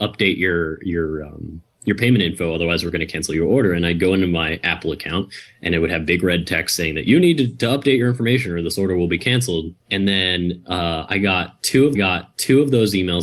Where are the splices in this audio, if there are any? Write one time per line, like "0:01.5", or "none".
0:09.8
0:11.9